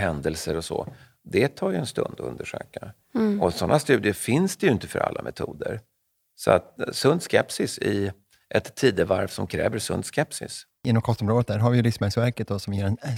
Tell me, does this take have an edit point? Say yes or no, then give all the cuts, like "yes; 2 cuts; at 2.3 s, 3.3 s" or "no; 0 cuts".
no; 0 cuts